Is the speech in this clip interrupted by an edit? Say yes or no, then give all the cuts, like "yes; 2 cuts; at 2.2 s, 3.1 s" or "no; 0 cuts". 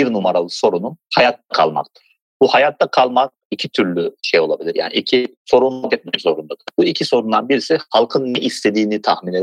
yes; 2 cuts; at 4.2 s, 5.9 s